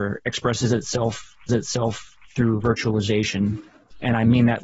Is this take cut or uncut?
cut